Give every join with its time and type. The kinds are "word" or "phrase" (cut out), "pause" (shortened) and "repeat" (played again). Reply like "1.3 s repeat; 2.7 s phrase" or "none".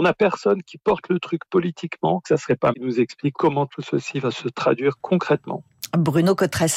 2.7 s word

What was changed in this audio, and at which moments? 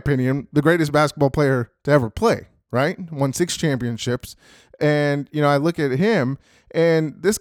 none

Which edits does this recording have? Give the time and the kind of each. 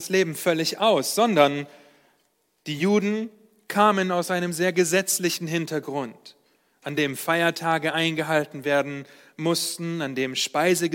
none

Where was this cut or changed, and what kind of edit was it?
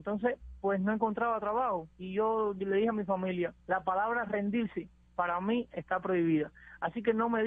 1.9 s pause; 3.6 s pause

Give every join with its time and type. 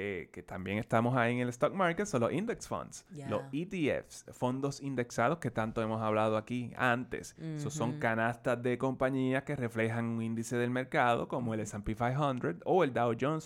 4.3 s word

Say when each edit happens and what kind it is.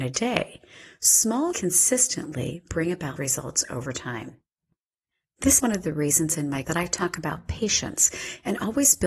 1.5 s word; 3.2 s word; 5.6 s word; 6.6 s word

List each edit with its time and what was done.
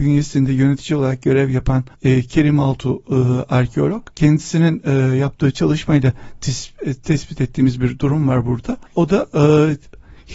1.9 s pause; 4.1 s pause; 8.9 s pause

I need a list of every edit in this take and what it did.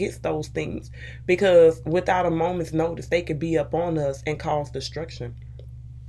none

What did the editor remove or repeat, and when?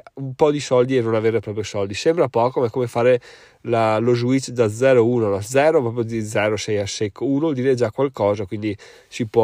none

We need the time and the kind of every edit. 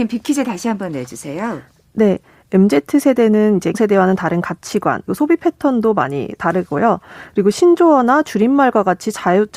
3.7 s word; 5.1 s word

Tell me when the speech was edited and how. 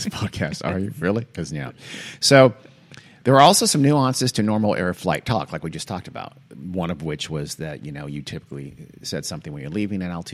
none

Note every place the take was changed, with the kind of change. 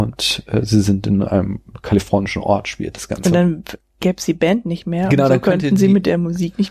none

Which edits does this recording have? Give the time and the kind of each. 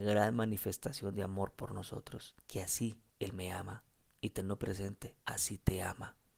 2.4 s pause; 3.1 s pause; 3.9 s pause; 5.2 s pause

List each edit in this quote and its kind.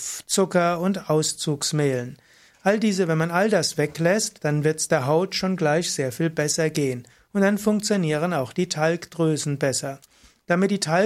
none

